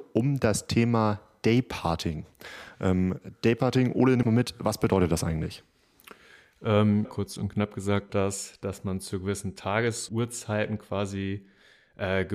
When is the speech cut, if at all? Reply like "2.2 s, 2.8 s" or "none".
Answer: 4.2 s, 7.0 s, 8.1 s, 10.1 s